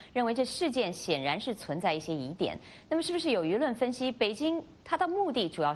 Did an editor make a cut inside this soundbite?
yes; 1 cut; at 4.8 s

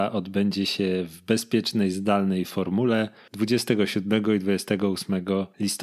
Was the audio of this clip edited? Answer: no; 0 cuts

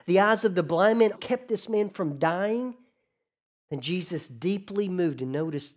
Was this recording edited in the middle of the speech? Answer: yes; 1 cut; at 1.1 s

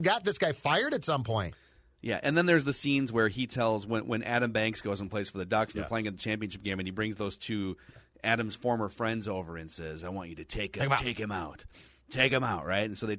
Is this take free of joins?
yes; 0 cuts

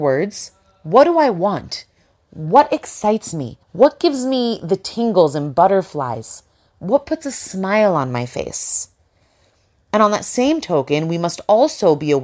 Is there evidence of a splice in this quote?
yes; 1 cut; at 3.6 s

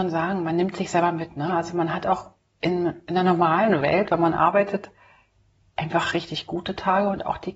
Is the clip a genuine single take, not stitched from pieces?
yes; 0 cuts

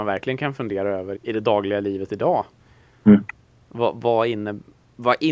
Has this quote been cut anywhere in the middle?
yes; 1 cut; at 1.2 s

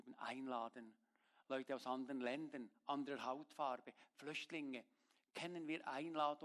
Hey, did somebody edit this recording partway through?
no; 0 cuts

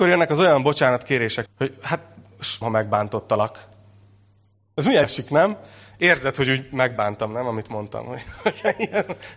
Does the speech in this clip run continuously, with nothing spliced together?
no; 3 cuts; at 1.5 s, 2.6 s, 5.0 s

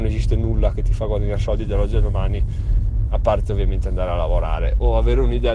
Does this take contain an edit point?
no; 0 cuts

